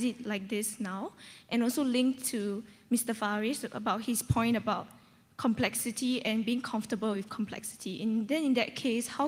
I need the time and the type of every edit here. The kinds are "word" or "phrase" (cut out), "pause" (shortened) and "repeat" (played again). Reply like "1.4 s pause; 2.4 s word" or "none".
none